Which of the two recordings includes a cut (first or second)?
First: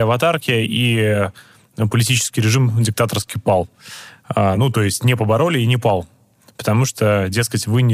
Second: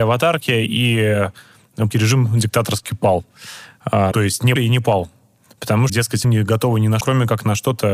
second